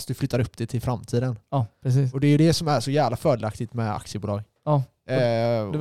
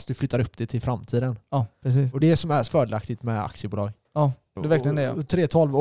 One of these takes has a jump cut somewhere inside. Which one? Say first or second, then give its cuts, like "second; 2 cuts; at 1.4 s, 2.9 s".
second; 3 cuts; at 2.2 s, 2.7 s, 4.6 s